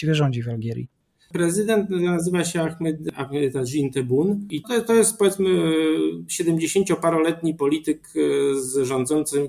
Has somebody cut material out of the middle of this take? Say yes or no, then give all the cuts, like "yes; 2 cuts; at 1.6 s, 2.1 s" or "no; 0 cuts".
yes; 1 cut; at 4.6 s